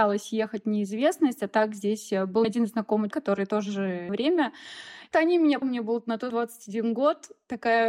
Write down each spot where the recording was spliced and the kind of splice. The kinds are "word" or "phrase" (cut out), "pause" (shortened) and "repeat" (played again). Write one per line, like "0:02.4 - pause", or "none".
0:02.4 - word
0:03.1 - word
0:04.1 - phrase
0:05.1 - phrase
0:05.6 - phrase
0:06.3 - word